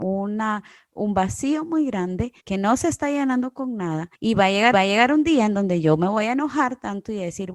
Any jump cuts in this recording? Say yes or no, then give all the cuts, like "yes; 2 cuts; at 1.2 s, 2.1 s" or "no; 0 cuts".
yes; 3 cuts; at 2.4 s, 4.1 s, 4.7 s